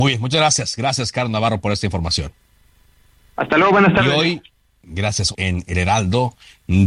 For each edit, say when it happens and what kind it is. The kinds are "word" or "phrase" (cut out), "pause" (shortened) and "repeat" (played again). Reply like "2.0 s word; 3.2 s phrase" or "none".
5.3 s word

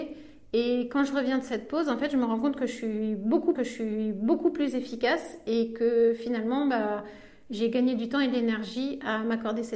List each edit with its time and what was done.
3.6 s repeat

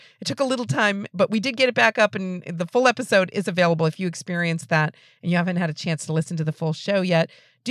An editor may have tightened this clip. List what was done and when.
none

